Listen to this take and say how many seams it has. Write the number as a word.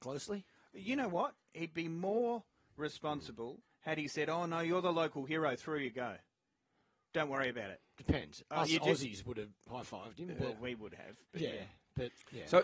zero